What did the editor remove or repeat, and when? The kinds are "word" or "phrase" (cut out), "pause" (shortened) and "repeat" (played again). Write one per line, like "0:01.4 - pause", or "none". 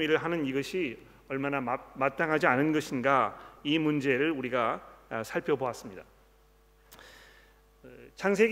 none